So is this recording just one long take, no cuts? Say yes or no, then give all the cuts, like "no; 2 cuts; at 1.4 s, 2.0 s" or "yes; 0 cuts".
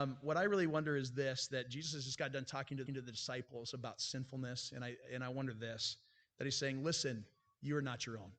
no; 1 cut; at 2.9 s